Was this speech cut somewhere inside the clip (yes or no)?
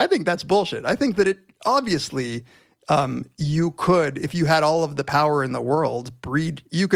no